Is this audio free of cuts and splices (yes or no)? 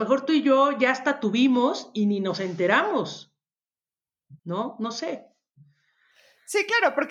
no